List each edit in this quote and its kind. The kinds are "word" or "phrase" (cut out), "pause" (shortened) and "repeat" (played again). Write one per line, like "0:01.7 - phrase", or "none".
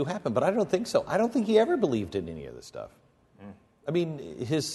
none